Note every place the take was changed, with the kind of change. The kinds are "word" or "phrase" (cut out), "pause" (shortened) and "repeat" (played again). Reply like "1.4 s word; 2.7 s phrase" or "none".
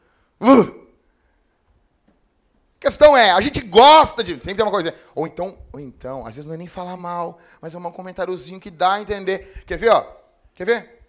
none